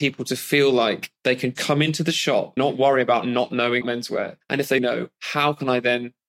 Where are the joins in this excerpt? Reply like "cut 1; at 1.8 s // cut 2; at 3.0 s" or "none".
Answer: cut 1; at 1.5 s // cut 2; at 2.6 s // cut 3; at 3.8 s // cut 4; at 4.8 s